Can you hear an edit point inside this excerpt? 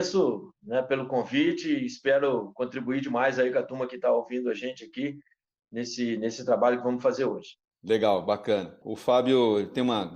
yes; 1 cut; at 8.8 s

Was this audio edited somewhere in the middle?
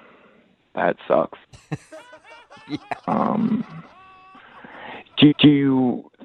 yes; 2 cuts; at 1.4 s, 5.3 s

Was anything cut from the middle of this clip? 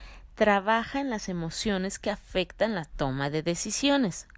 no; 0 cuts

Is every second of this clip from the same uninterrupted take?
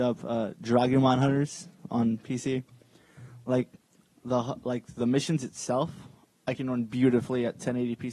yes; 0 cuts

